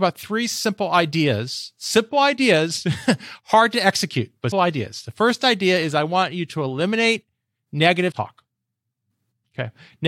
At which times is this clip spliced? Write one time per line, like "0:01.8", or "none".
0:04.5
0:08.1